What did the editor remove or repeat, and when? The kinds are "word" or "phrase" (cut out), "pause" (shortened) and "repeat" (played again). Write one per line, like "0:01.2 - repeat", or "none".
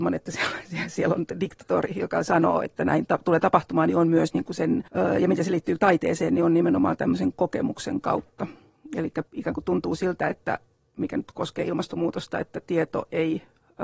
0:03.1 - word
0:04.9 - pause
0:09.3 - pause